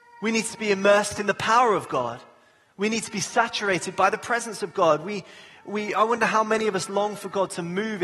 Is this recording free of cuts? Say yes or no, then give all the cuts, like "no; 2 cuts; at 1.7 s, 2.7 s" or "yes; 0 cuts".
yes; 0 cuts